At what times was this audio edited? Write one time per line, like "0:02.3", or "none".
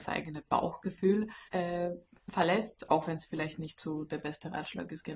0:01.5